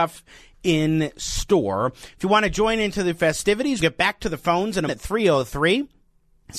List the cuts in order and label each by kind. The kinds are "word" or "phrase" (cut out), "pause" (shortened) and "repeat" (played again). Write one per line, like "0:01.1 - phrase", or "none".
0:03.8 - word
0:04.9 - word